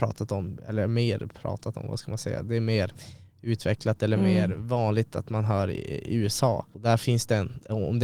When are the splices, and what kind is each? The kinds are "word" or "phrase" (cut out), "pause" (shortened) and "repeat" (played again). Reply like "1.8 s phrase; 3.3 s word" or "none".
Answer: none